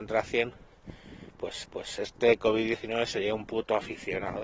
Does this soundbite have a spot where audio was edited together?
yes; 1 cut; at 1.6 s

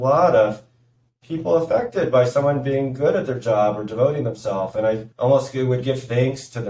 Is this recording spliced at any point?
yes; 1 cut; at 5.1 s

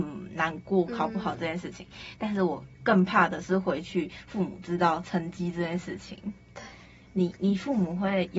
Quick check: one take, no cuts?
yes; 0 cuts

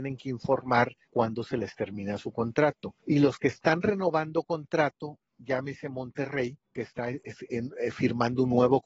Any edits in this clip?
yes; 3 cuts; at 1.0 s, 3.0 s, 6.6 s

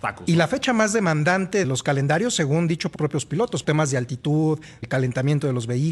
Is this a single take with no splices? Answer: no; 4 cuts; at 1.6 s, 2.9 s, 3.6 s, 4.8 s

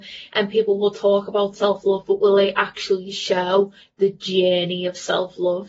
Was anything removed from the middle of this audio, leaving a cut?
no; 0 cuts

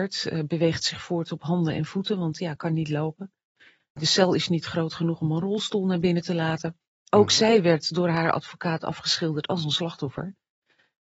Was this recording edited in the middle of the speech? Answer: no; 0 cuts

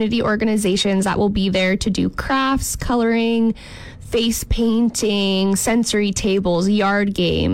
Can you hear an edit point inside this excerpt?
no; 0 cuts

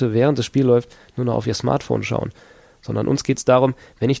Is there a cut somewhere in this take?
no; 0 cuts

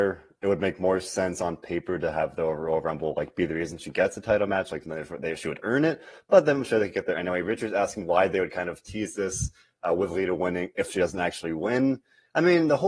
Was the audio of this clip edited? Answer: no; 0 cuts

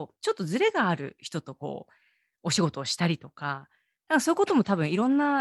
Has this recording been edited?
no; 0 cuts

